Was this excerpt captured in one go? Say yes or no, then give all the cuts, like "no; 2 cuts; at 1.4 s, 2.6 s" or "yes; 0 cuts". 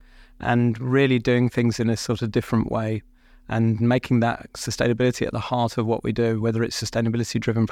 yes; 0 cuts